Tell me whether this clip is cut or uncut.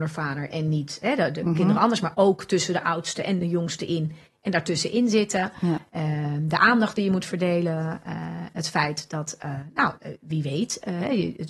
uncut